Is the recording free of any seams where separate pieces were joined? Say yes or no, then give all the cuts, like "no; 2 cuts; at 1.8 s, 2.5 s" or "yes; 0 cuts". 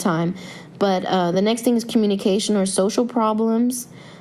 yes; 0 cuts